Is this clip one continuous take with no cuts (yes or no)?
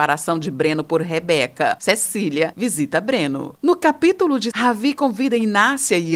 no